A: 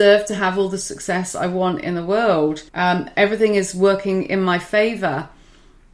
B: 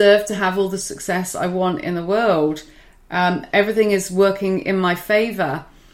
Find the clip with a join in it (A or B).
A